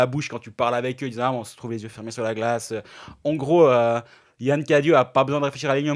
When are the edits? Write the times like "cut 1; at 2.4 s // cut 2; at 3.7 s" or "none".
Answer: none